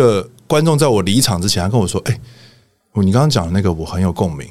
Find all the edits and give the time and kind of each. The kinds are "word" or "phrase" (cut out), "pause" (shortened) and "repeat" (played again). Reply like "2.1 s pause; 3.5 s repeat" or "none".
none